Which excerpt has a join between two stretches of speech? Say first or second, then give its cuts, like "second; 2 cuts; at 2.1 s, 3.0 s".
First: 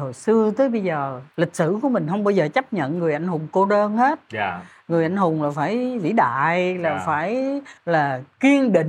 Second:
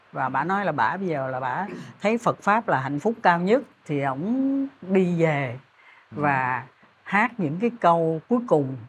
first; 2 cuts; at 1.3 s, 7.8 s